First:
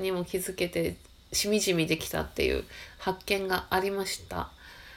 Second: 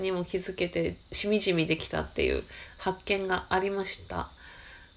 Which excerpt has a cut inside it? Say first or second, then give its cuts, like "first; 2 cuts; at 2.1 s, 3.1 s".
second; 1 cut; at 1.0 s